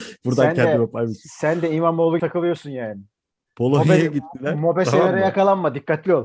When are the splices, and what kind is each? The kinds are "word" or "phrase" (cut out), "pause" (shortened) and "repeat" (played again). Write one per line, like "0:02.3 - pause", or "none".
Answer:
0:02.2 - word

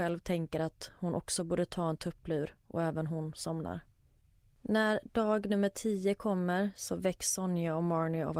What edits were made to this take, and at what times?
0:04.2 - pause

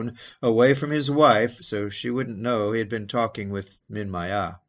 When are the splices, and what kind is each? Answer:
none

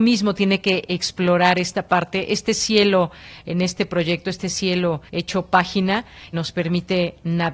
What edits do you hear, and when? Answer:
0:05.1 - pause
0:06.3 - word

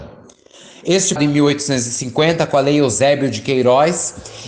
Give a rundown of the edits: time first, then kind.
0:01.2 - phrase

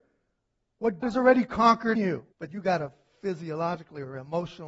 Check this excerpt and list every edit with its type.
0:01.0 - word
0:02.0 - word
0:02.3 - pause

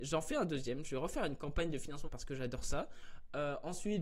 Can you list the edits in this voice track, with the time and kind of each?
0:02.0 - word

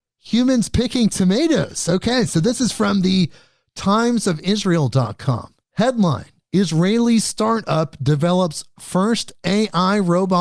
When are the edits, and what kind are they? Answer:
0:05.6 - pause

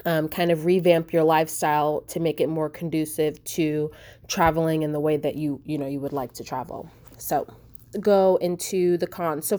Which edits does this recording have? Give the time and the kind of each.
0:02.1 - word
0:07.9 - word

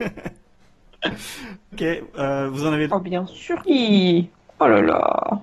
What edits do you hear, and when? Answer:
0:01.7 - word
0:02.9 - word
0:03.7 - word

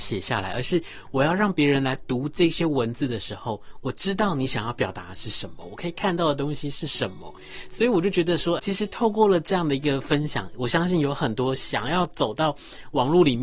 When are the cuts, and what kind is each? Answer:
0:08.6 - word

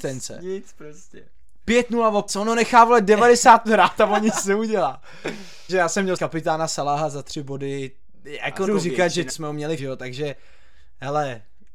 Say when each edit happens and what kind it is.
0:02.3 - word
0:03.6 - word
0:05.7 - word
0:06.2 - word
0:08.7 - word
0:09.3 - phrase
0:09.8 - word

